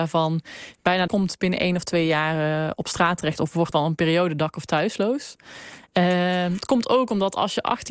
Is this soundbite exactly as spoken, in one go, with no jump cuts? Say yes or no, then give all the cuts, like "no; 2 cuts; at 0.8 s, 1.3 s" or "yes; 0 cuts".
no; 2 cuts; at 1.1 s, 3.7 s